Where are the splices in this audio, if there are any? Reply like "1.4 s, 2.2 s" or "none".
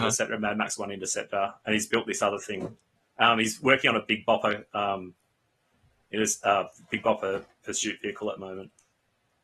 3.0 s